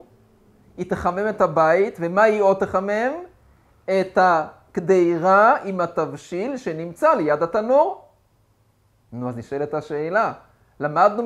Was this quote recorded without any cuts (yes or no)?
yes